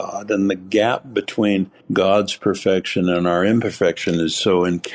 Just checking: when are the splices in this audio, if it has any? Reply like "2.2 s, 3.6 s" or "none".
1.8 s

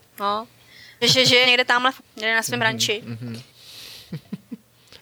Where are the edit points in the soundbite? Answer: 1.0 s, 1.4 s, 2.0 s

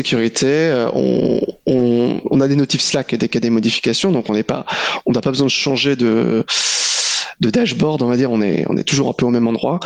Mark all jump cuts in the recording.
none

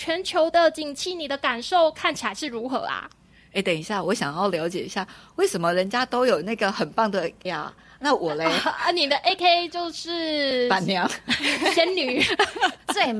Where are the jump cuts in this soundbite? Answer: 7.5 s

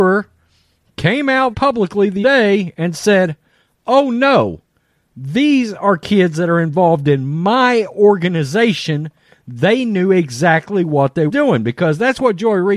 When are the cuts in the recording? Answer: 1.5 s, 2.2 s, 11.3 s

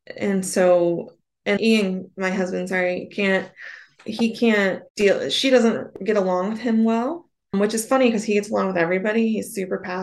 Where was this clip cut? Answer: 1.6 s, 4.0 s, 4.9 s, 7.5 s

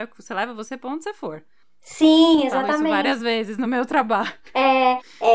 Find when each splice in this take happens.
none

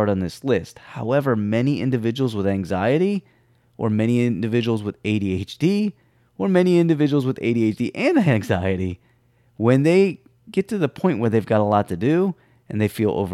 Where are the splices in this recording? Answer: none

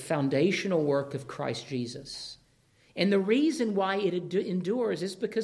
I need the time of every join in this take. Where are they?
none

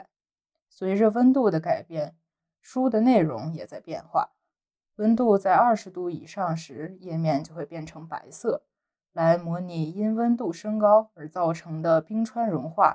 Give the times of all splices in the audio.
none

